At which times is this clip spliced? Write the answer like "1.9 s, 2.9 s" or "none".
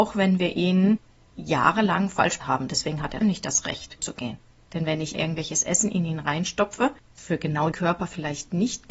2.4 s, 3.2 s, 4.0 s, 5.1 s, 7.2 s, 7.7 s